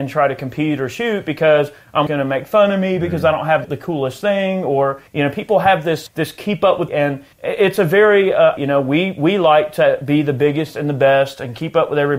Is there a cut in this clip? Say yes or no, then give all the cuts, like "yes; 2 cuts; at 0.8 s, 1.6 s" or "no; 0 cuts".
yes; 7 cuts; at 2.1 s, 3.6 s, 5.1 s, 6.1 s, 6.9 s, 7.3 s, 8.6 s